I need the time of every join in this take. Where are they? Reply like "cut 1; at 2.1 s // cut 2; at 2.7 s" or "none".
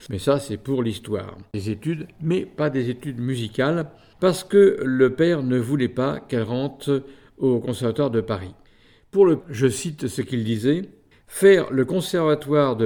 cut 1; at 9.4 s